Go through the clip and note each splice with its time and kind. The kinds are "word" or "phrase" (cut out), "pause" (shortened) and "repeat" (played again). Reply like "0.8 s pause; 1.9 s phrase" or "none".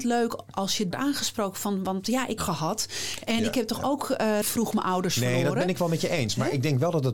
0.9 s phrase; 2.4 s phrase; 4.4 s word